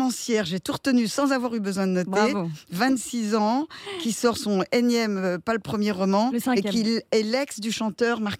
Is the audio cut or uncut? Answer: uncut